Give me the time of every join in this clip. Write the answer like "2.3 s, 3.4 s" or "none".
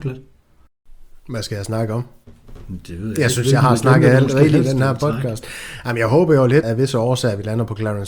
6.6 s

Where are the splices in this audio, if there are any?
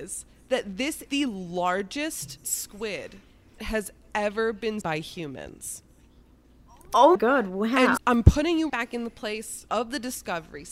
1.1 s, 2.4 s, 3.6 s, 4.8 s, 7.2 s, 8.0 s, 8.7 s, 9.7 s

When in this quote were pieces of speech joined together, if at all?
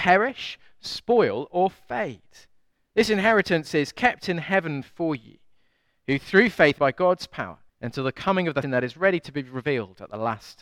6.8 s, 7.7 s, 8.6 s

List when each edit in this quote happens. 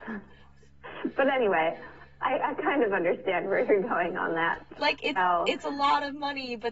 5.2 s

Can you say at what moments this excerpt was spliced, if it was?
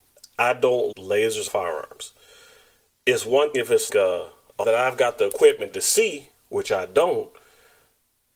0.9 s, 1.5 s, 3.5 s, 3.9 s, 4.6 s

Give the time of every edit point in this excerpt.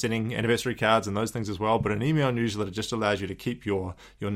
none

